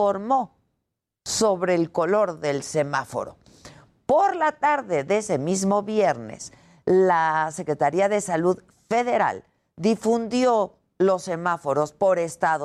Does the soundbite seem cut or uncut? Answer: uncut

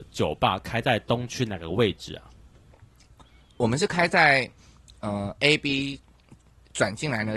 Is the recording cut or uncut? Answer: uncut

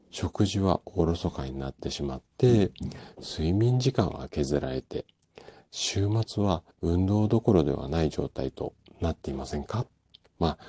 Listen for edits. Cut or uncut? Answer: cut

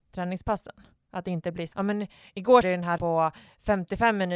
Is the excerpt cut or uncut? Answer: cut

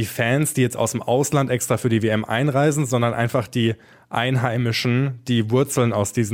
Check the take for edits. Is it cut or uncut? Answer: uncut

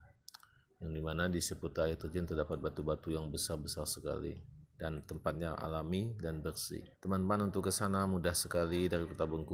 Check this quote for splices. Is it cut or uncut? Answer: cut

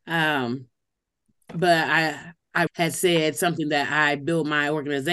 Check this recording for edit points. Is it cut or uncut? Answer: cut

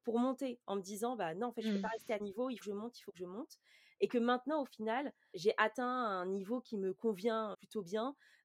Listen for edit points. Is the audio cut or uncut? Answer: cut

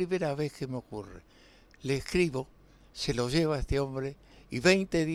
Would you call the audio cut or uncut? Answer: uncut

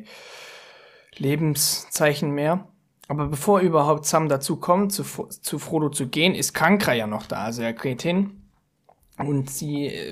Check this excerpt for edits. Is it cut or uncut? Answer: uncut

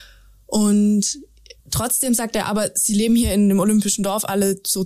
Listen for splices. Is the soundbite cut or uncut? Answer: cut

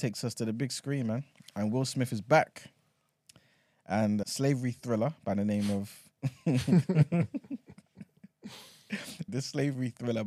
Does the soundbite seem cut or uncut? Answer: cut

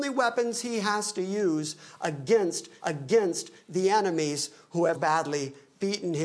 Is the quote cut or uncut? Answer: cut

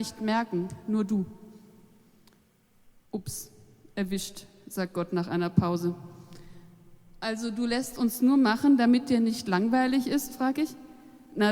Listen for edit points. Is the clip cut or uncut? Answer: uncut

